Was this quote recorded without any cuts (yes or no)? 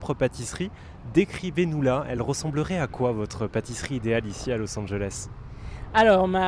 yes